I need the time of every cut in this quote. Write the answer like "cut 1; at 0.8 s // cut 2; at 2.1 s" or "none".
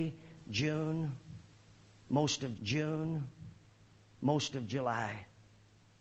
cut 1; at 2.6 s